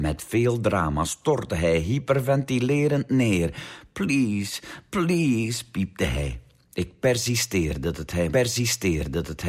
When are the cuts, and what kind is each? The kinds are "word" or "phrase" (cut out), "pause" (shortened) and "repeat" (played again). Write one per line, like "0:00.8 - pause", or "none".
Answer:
0:08.3 - repeat